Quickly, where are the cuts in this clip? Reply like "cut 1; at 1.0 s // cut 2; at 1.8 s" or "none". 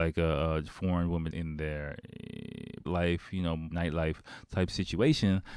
cut 1; at 1.3 s // cut 2; at 2.9 s // cut 3; at 3.7 s